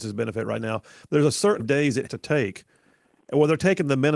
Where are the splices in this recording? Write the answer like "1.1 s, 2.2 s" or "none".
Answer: 1.6 s, 2.1 s